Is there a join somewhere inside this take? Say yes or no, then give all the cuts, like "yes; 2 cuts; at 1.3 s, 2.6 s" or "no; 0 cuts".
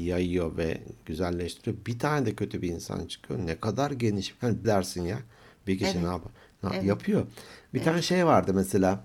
yes; 1 cut; at 4.6 s